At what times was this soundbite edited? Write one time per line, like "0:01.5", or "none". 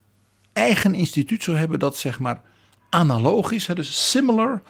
none